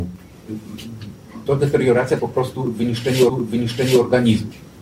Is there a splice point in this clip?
yes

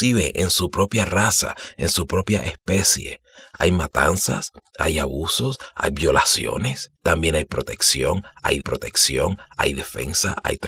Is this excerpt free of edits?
no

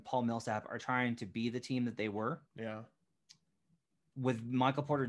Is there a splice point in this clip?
yes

